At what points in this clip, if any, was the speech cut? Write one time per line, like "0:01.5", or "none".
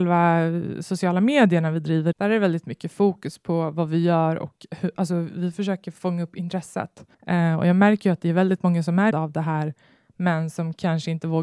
0:02.1
0:07.1
0:09.1